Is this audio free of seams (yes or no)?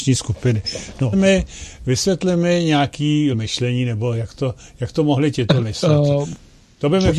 no